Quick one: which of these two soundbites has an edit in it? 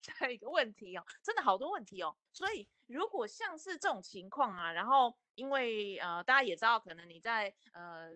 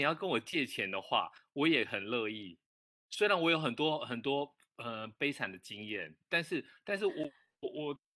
first; 1 cut; at 2.3 s

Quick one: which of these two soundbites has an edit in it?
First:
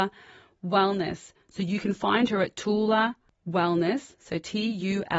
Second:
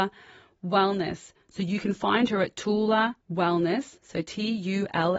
second; 1 cut; at 3.2 s

